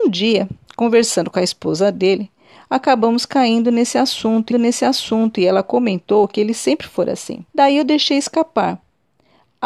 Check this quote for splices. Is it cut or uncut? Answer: cut